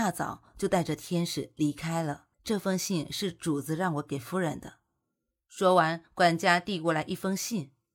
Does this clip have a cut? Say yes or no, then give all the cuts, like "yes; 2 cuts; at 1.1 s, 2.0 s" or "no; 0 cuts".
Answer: yes; 1 cut; at 2.3 s